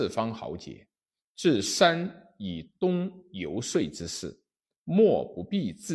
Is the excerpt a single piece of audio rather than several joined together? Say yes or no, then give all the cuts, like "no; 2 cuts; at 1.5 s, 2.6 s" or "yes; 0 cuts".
yes; 0 cuts